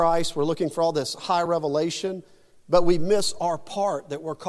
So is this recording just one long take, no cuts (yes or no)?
yes